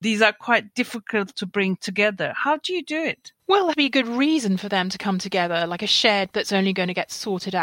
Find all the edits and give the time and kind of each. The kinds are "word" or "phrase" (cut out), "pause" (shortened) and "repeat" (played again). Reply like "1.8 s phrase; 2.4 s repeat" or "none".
1.3 s word; 3.4 s pause; 3.7 s word; 6.3 s word